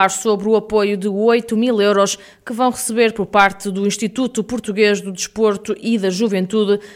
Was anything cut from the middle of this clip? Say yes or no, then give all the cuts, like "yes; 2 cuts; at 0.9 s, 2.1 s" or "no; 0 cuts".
no; 0 cuts